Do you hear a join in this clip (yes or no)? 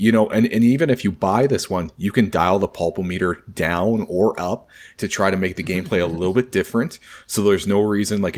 no